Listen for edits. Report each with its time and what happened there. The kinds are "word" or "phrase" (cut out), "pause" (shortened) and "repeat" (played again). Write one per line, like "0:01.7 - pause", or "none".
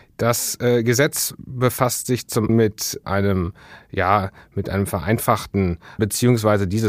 0:02.5 - word
0:03.0 - word
0:06.0 - word